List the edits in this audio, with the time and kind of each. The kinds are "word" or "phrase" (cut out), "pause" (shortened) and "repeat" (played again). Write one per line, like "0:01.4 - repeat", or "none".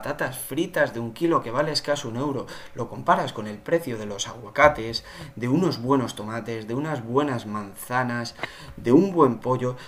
none